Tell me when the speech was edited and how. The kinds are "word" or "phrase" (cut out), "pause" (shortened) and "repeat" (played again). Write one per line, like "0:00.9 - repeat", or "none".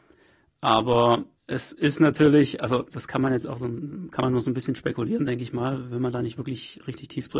0:01.4 - pause
0:02.9 - word